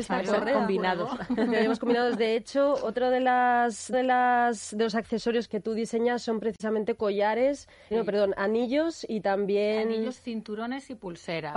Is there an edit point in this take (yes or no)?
yes